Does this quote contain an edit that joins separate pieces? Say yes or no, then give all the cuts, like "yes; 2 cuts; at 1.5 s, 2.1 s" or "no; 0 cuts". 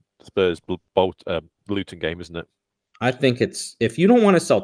no; 0 cuts